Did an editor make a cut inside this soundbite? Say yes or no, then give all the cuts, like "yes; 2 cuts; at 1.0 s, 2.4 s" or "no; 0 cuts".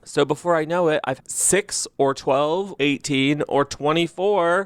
yes; 2 cuts; at 1.2 s, 2.8 s